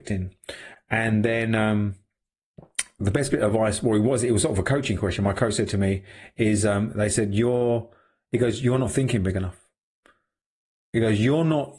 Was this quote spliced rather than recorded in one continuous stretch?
no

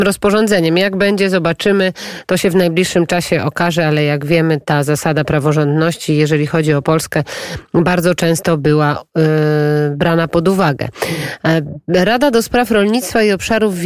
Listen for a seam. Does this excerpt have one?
no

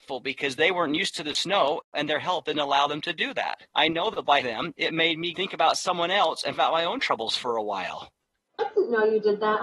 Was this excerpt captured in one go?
no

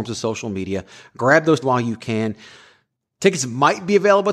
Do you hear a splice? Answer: yes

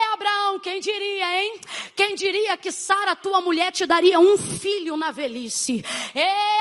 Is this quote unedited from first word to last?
yes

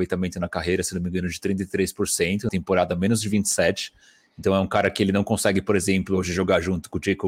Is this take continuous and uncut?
no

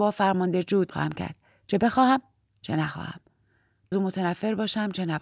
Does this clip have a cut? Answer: yes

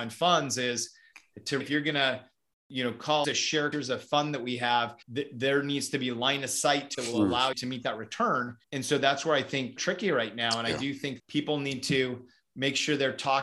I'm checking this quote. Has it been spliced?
yes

